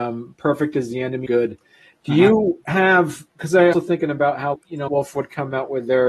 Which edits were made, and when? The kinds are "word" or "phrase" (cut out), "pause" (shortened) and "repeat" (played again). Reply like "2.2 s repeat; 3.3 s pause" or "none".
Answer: 1.3 s word; 3.7 s word; 4.5 s word; 4.9 s word